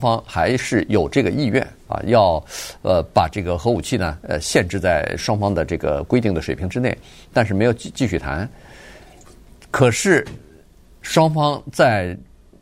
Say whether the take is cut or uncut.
uncut